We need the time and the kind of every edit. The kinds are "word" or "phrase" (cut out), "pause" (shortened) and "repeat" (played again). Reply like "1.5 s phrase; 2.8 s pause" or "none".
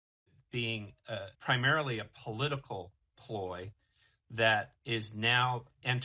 1.3 s pause; 4.8 s pause